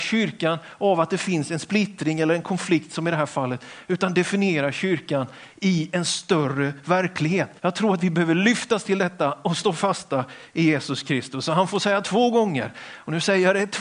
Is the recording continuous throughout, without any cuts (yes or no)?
no